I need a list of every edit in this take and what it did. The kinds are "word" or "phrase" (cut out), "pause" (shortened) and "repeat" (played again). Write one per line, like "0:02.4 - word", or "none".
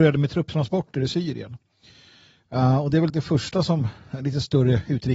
0:03.1 - word